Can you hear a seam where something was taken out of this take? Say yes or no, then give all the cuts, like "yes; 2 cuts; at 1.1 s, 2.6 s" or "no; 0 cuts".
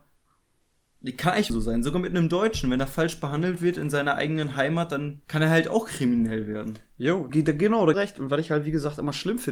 yes; 4 cuts; at 1.5 s, 5.2 s, 7.3 s, 7.9 s